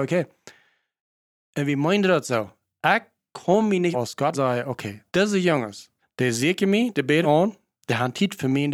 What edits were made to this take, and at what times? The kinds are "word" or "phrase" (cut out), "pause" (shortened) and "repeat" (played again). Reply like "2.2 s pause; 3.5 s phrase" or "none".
3.9 s phrase; 4.3 s word; 5.1 s pause; 6.0 s pause; 7.2 s word